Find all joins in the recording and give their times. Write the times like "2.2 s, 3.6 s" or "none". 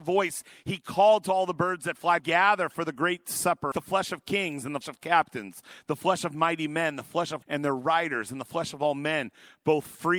2.2 s, 3.7 s, 4.8 s, 7.4 s